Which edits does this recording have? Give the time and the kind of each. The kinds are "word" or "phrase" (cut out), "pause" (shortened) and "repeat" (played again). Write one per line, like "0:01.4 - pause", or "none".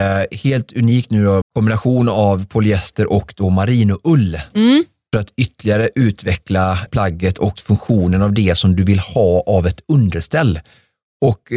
0:01.4 - word
0:06.9 - word
0:07.6 - word